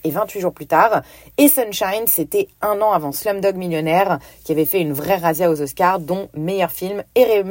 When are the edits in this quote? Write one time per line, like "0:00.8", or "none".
none